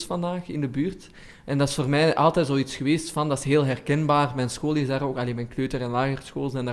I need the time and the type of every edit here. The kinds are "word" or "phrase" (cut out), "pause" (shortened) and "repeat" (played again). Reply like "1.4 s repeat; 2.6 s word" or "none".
none